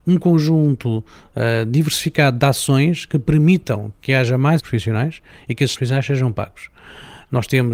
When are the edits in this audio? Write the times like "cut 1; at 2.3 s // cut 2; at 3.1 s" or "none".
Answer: cut 1; at 4.6 s // cut 2; at 5.7 s